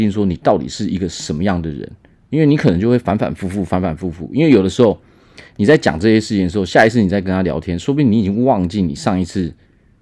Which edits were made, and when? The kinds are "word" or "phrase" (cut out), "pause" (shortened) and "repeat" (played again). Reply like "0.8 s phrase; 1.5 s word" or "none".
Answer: none